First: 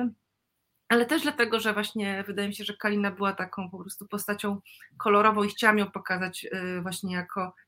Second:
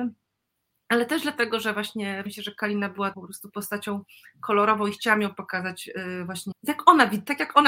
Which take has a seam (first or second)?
second